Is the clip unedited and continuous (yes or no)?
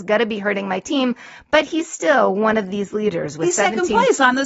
yes